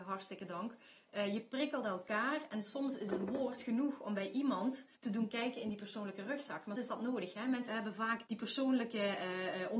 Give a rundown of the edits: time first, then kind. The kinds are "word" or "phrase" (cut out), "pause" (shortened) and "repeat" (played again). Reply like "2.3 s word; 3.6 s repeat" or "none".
4.9 s pause; 6.8 s word; 7.7 s word; 8.3 s word